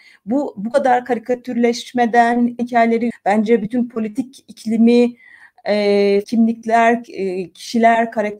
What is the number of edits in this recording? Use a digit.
3